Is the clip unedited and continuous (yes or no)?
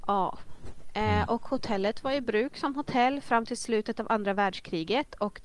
yes